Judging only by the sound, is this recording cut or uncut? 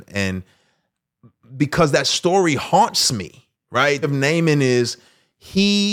cut